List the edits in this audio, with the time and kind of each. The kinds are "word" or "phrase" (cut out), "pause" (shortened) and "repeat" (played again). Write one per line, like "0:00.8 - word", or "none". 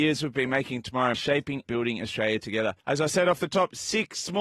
0:01.1 - word
0:01.7 - word
0:02.8 - pause